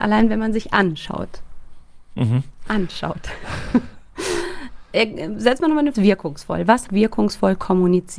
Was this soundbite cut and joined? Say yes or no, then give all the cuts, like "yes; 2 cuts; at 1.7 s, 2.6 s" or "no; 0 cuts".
yes; 2 cuts; at 5.9 s, 6.9 s